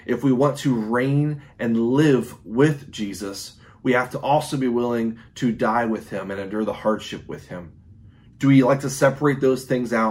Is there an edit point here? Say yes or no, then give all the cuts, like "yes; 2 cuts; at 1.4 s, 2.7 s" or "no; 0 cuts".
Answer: no; 0 cuts